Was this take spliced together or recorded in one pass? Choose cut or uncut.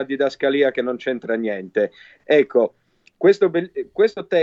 uncut